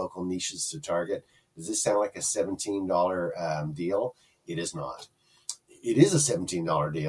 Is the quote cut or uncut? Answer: uncut